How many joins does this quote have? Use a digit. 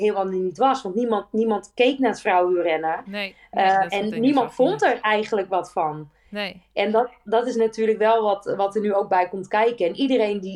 0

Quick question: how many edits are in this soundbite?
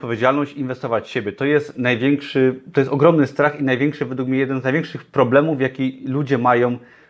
0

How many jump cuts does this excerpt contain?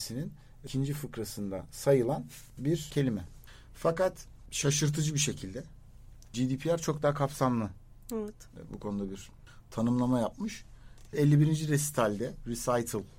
1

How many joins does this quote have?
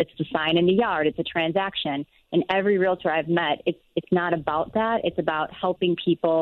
0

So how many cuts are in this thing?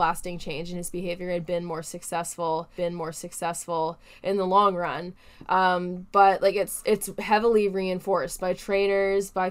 1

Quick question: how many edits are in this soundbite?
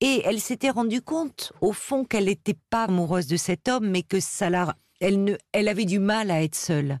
1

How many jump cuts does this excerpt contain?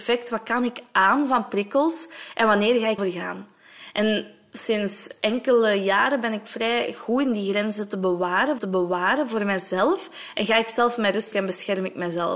3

